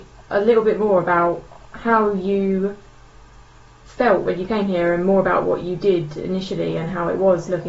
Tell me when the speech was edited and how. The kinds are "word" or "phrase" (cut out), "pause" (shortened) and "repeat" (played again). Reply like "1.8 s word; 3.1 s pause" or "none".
none

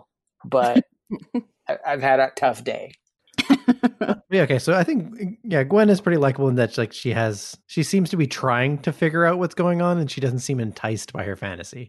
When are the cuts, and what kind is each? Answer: 4.2 s pause; 7.6 s pause

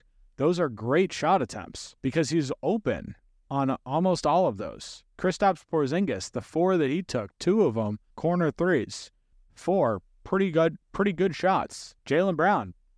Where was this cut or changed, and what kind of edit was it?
2.0 s pause; 8.1 s pause; 12.0 s pause

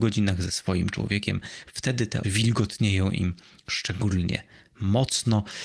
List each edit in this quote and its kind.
2.2 s word

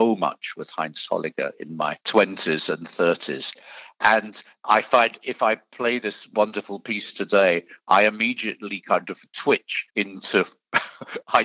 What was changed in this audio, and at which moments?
2.0 s pause; 9.9 s pause

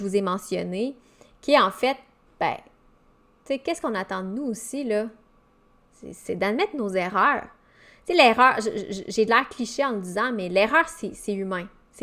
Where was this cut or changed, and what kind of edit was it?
none

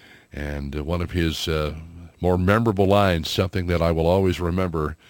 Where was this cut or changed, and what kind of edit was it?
none

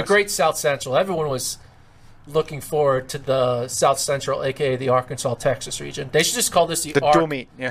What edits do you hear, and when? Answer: none

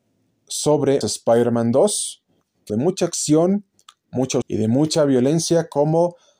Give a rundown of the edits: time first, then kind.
1.0 s word; 2.7 s phrase; 4.4 s word

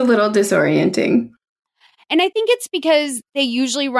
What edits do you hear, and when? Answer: none

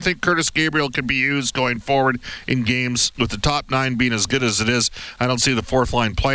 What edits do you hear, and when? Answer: 3.1 s word

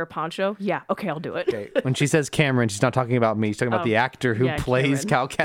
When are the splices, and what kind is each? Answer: none

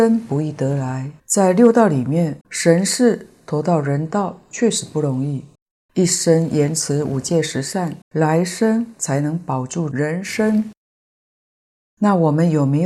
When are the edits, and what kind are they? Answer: 1.2 s pause; 2.4 s pause; 5.6 s pause; 8.0 s pause

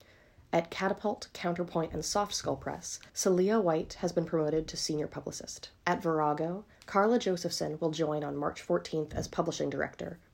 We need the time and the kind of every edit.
3.1 s pause; 5.8 s pause; 6.7 s pause

